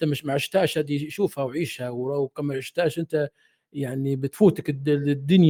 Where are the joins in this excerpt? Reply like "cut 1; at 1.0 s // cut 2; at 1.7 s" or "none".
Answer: none

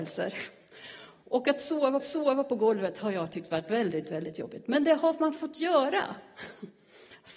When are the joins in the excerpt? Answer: cut 1; at 2.0 s

